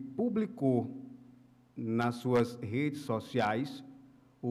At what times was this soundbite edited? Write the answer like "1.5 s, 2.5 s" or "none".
none